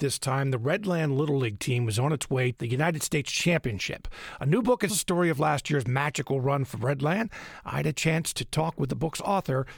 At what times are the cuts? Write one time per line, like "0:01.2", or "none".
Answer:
0:02.5
0:04.9